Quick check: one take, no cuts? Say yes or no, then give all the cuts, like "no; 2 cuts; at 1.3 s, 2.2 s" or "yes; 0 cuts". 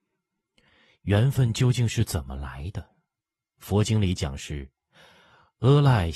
yes; 0 cuts